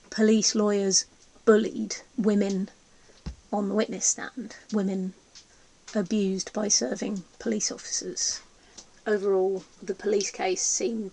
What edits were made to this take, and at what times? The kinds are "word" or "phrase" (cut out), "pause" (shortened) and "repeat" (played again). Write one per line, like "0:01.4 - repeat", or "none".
0:02.1 - pause
0:04.6 - pause
0:09.7 - pause